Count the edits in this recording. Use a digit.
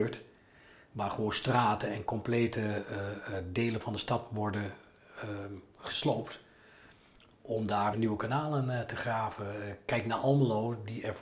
1